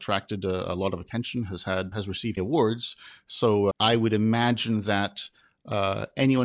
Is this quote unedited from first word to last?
no; 3 cuts; at 1.9 s, 2.4 s, 3.7 s

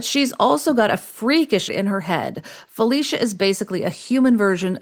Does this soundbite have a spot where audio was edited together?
yes; 1 cut; at 1.7 s

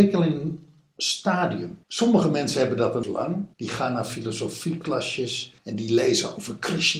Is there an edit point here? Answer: yes; 4 cuts; at 1.8 s, 3.0 s, 3.5 s, 5.6 s

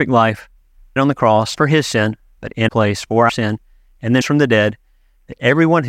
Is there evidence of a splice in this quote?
yes; 5 cuts; at 1.0 s, 1.5 s, 2.7 s, 3.3 s, 4.2 s

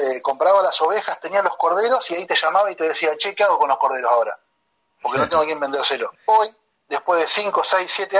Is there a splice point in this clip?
no; 0 cuts

